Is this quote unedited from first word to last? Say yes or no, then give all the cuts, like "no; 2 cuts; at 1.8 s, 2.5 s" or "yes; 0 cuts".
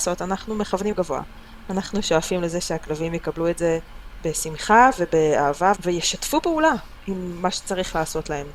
no; 2 cuts; at 0.9 s, 5.8 s